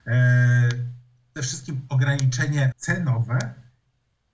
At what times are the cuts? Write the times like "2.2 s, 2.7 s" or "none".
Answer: 1.4 s, 2.7 s